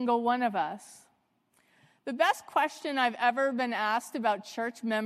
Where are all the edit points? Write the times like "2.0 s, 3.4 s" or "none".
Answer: none